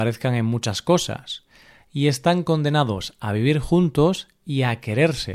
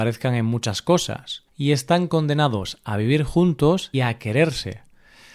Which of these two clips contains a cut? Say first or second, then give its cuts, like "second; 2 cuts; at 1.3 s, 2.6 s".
second; 2 cuts; at 1.5 s, 3.9 s